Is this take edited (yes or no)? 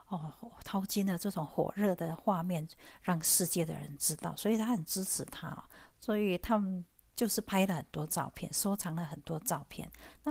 no